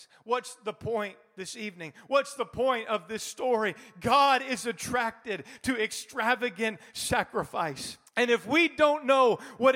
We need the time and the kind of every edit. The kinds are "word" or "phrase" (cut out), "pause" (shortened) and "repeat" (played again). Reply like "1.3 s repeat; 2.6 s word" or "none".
8.1 s pause